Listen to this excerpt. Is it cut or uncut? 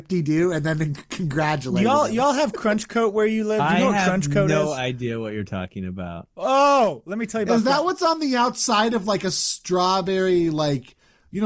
uncut